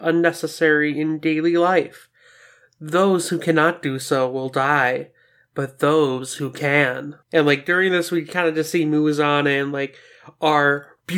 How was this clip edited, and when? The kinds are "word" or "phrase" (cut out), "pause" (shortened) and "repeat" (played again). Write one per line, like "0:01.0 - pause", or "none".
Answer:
0:07.2 - pause